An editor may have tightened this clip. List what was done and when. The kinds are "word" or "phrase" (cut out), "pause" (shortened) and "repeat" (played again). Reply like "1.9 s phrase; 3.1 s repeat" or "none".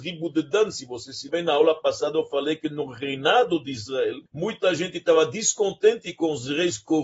1.3 s word; 4.3 s pause